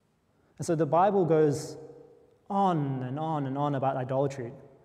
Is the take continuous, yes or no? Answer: yes